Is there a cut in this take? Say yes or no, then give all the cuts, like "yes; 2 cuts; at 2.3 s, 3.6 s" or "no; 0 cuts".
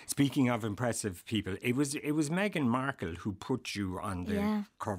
no; 0 cuts